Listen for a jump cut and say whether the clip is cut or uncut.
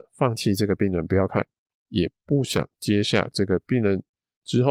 uncut